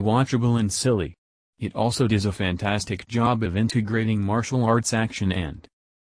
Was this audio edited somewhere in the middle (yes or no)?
no